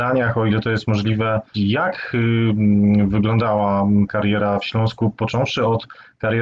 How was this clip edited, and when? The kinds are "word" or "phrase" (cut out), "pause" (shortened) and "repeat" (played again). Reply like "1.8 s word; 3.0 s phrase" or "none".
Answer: 1.5 s phrase; 4.1 s word